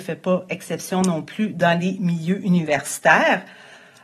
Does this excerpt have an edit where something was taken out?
no; 0 cuts

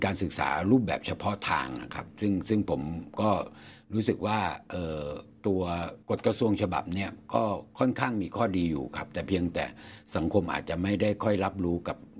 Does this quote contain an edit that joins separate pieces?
yes; 1 cut; at 6.0 s

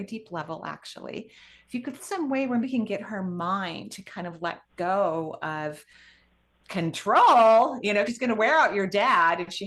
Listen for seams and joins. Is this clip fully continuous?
no; 3 cuts; at 2.0 s, 2.6 s, 8.1 s

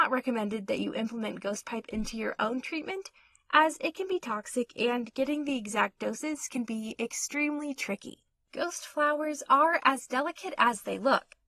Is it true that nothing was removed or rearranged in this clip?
yes; 0 cuts

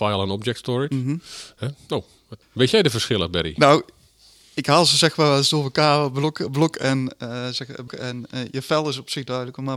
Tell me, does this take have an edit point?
yes; 2 cuts; at 2.4 s, 7.9 s

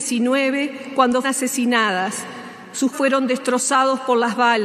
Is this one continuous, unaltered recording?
no; 2 cuts; at 1.2 s, 2.9 s

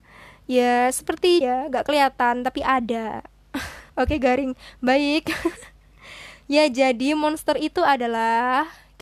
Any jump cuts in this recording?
yes; 2 cuts; at 1.4 s, 3.9 s

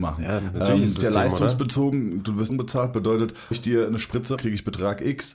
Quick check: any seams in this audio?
yes; 4 cuts; at 1.0 s, 2.5 s, 3.5 s, 4.4 s

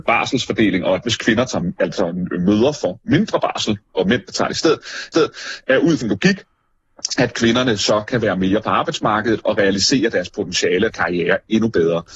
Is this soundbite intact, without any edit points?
no; 4 cuts; at 1.0 s, 5.1 s, 6.0 s, 10.9 s

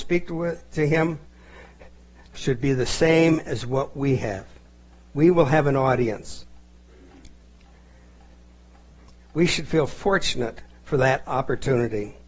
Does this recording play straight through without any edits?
yes; 0 cuts

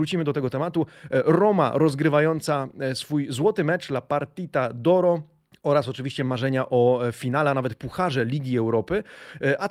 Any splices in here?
yes; 1 cut; at 5.5 s

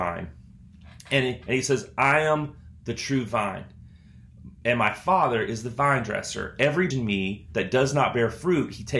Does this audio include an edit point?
yes; 1 cut; at 6.9 s

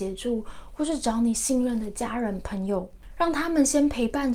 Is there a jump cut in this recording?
no; 0 cuts

